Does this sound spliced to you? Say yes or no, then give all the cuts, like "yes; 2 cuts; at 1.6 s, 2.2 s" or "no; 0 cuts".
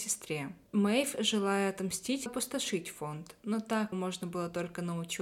yes; 2 cuts; at 2.3 s, 3.9 s